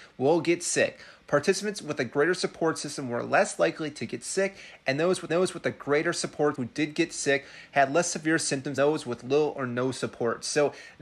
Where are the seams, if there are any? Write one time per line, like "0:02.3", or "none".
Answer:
0:05.3
0:06.5
0:08.8